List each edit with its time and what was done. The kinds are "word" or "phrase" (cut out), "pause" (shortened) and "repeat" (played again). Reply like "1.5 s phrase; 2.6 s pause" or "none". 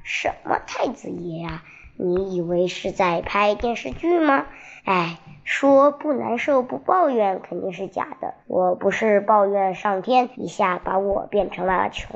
4.8 s pause; 8.4 s pause; 10.3 s pause